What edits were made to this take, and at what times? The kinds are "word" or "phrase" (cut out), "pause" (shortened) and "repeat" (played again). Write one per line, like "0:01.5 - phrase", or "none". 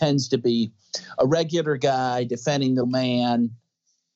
0:02.8 - word